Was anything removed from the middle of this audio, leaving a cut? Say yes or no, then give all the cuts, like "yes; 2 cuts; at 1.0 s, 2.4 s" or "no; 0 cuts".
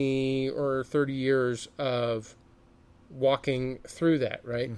no; 0 cuts